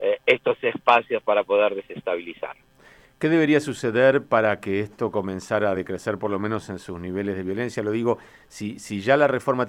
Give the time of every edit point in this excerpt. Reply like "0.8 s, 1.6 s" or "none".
none